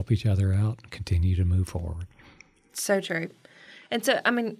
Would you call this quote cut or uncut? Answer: uncut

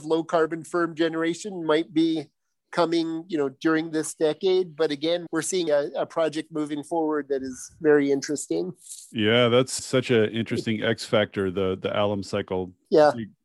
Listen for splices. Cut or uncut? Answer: cut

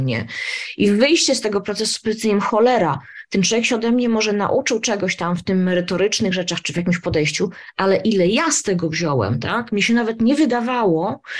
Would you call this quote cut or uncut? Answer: uncut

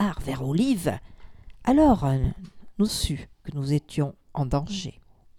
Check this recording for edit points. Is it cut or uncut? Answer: cut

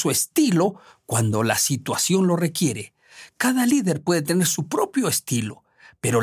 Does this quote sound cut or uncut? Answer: uncut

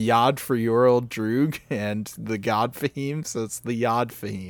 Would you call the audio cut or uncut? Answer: uncut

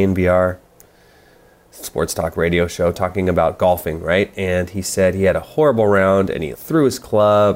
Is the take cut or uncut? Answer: cut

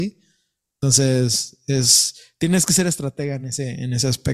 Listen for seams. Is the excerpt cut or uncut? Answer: uncut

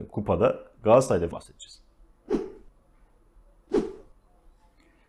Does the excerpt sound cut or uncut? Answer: cut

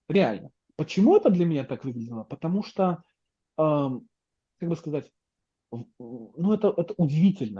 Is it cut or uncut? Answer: uncut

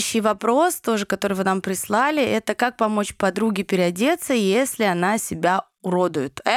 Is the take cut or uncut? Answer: uncut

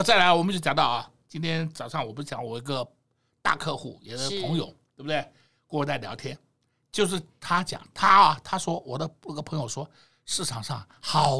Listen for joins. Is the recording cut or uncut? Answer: uncut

